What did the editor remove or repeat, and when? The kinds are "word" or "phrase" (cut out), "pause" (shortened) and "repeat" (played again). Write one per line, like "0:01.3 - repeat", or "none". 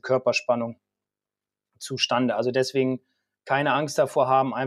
none